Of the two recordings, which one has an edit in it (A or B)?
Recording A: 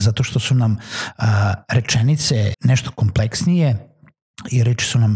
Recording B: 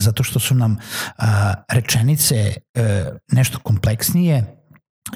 A